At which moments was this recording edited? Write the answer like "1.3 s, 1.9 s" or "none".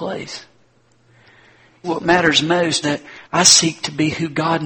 1.8 s, 2.8 s, 3.2 s

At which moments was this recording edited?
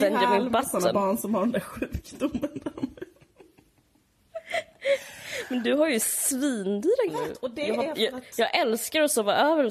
7.1 s

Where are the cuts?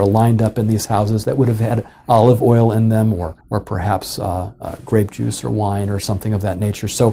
3.4 s

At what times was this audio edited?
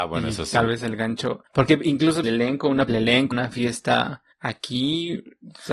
1.5 s, 2.2 s, 2.9 s, 3.3 s, 4.3 s

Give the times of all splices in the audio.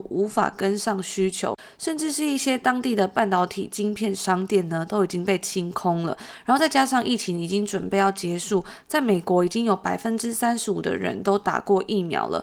none

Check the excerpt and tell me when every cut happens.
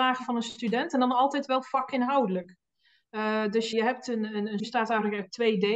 3.7 s, 4.6 s

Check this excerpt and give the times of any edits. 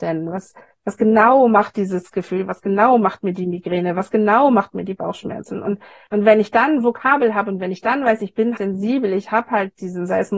8.6 s

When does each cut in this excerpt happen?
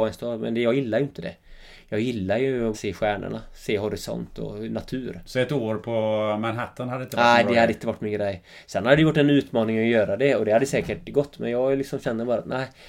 2.7 s

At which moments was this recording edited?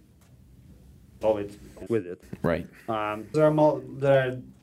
1.2 s, 1.9 s, 3.3 s

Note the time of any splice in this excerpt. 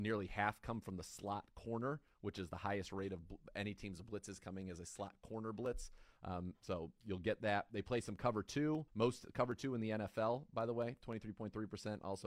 8.9 s

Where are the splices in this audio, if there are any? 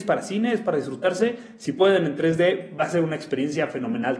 none

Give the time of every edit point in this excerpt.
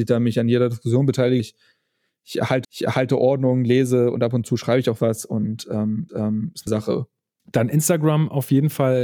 1.4 s, 2.6 s, 6.1 s, 6.7 s, 7.4 s

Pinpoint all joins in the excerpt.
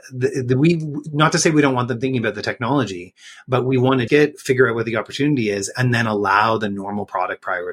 4.1 s

